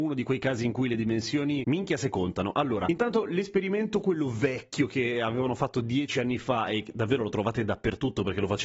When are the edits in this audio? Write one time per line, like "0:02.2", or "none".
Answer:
none

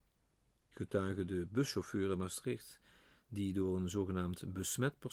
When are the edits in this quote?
none

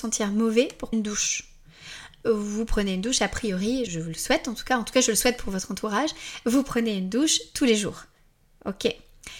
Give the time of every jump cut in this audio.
0:00.9
0:03.9

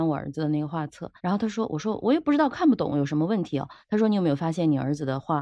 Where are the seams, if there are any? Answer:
0:01.2

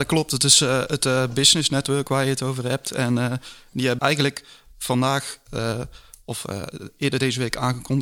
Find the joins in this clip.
0:04.0

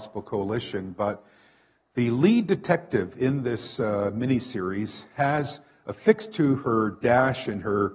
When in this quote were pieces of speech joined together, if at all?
none

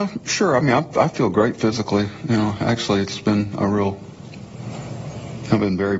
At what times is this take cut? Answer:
none

